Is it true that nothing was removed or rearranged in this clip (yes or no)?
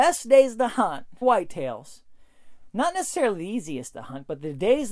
no